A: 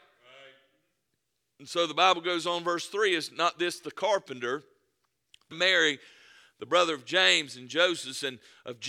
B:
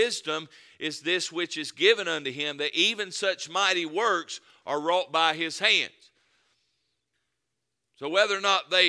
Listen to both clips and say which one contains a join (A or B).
A